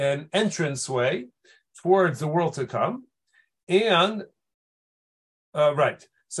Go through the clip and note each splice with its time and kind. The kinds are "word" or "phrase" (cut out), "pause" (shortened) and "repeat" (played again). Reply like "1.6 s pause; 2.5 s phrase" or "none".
none